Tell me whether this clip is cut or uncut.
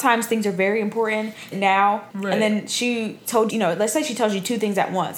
cut